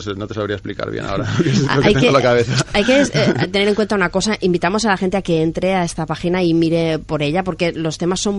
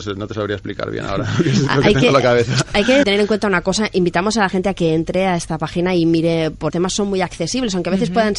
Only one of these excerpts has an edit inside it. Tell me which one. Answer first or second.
second